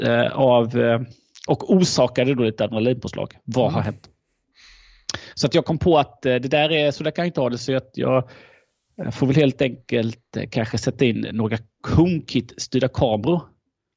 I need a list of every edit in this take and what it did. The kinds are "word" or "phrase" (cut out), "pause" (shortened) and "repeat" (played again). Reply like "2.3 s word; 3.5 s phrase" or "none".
1.3 s pause